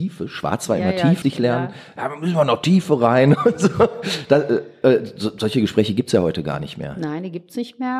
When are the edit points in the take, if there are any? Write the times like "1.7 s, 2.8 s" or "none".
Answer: 1.2 s

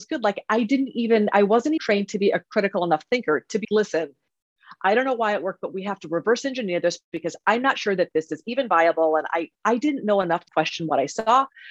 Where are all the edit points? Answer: 1.8 s, 3.6 s, 9.5 s, 10.5 s

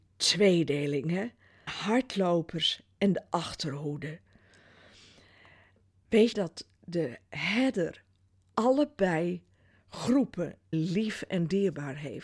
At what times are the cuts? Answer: 1.7 s, 6.3 s, 10.7 s

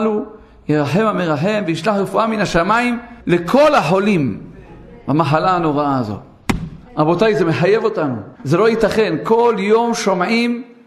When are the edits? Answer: 3.2 s, 6.9 s, 8.4 s

